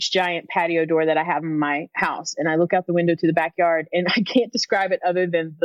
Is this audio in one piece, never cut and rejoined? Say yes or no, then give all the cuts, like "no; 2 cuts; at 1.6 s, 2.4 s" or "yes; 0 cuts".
yes; 0 cuts